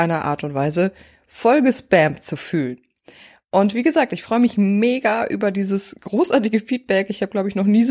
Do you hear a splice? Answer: no; 0 cuts

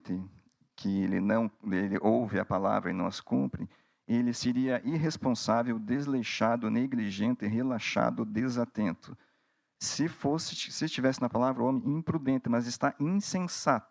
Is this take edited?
no; 0 cuts

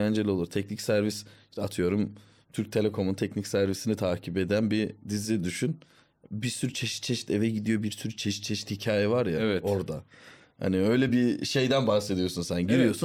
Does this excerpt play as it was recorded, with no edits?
yes; 0 cuts

